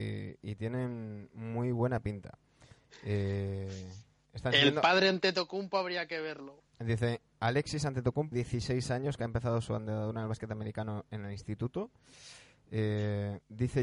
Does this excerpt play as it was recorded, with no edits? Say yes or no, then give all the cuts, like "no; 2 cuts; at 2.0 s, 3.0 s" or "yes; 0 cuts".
no; 2 cuts; at 6.7 s, 8.3 s